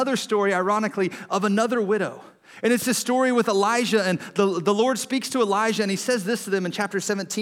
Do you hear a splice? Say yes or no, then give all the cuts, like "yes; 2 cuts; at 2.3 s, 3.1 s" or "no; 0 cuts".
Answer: no; 0 cuts